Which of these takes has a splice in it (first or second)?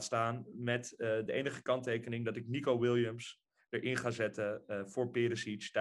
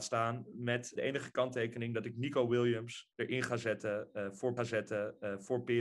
second